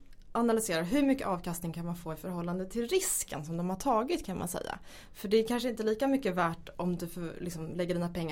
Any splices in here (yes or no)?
no